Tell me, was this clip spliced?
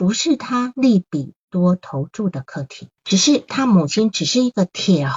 yes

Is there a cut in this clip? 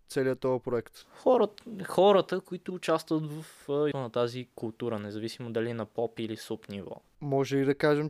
yes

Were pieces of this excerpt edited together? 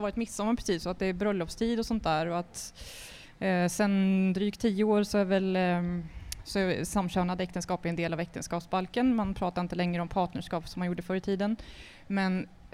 no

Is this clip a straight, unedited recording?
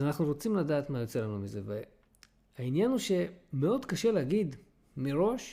yes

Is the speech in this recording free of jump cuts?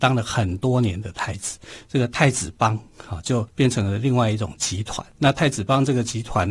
no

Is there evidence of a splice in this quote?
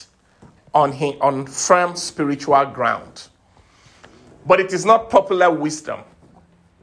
no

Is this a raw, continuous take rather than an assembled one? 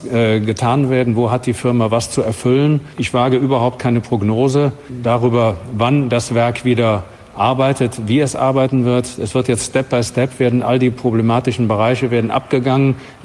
yes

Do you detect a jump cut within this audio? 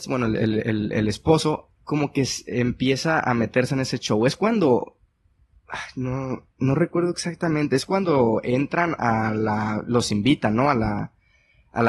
yes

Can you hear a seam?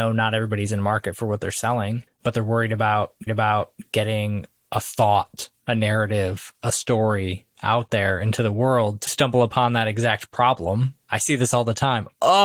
yes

